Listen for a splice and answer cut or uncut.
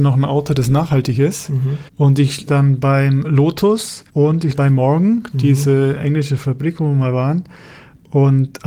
cut